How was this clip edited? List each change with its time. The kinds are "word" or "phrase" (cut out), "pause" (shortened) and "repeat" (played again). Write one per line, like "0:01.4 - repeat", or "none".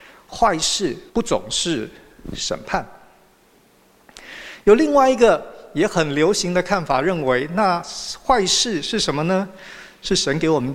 0:01.1 - pause